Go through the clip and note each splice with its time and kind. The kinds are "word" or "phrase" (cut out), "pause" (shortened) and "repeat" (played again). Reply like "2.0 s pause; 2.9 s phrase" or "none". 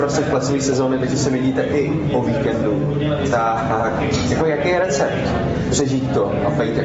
none